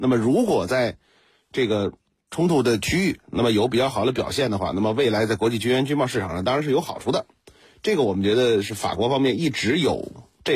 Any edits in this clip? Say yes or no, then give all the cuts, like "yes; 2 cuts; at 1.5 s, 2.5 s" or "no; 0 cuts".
no; 0 cuts